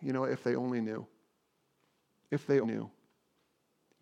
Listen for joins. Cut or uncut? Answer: cut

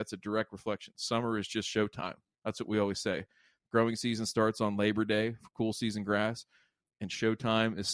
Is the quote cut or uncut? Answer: uncut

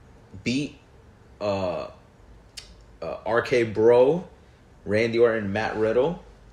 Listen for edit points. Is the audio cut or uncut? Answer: uncut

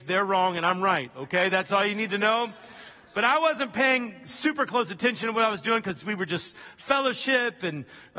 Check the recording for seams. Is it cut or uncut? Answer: uncut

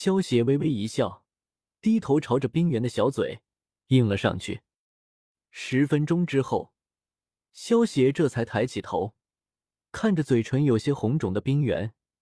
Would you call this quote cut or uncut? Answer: uncut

